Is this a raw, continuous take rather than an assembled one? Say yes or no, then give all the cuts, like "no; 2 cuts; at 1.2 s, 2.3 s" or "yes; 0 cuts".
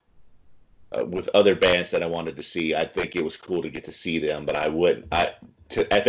yes; 0 cuts